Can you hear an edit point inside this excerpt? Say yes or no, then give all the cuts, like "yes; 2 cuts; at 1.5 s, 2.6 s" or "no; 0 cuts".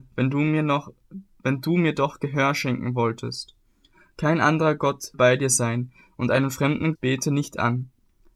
yes; 2 cuts; at 5.1 s, 6.9 s